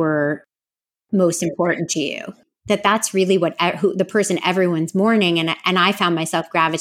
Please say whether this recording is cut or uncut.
uncut